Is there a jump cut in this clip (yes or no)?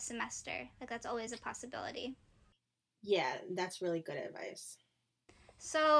no